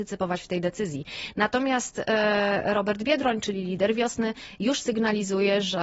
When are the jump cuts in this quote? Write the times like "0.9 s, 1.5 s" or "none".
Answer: none